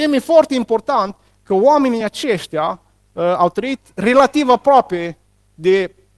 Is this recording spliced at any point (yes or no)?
no